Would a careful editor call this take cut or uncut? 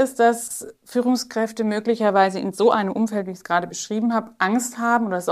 uncut